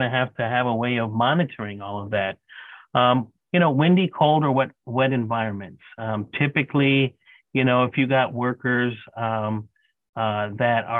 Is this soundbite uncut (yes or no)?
yes